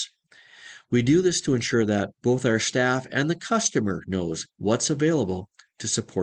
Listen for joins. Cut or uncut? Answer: cut